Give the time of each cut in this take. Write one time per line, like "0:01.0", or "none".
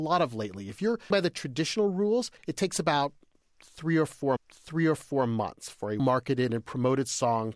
0:01.1
0:02.4
0:04.4
0:06.0